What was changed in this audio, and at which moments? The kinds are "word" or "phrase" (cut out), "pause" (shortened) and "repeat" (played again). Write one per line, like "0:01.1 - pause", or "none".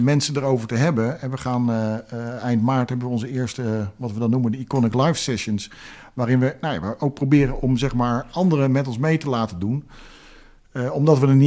none